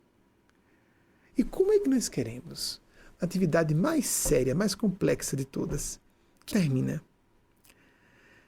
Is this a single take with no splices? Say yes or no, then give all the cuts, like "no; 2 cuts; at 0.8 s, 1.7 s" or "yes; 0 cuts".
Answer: no; 1 cut; at 6.5 s